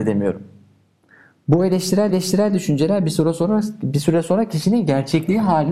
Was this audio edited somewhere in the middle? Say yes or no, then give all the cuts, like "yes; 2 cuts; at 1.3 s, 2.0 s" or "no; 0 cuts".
yes; 1 cut; at 2.1 s